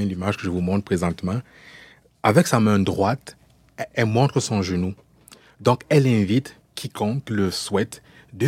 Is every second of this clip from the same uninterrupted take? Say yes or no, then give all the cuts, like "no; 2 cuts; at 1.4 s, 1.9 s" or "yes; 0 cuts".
no; 2 cuts; at 3.9 s, 6.6 s